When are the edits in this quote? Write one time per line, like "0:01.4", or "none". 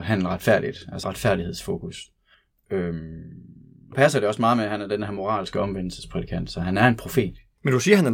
0:01.0
0:03.9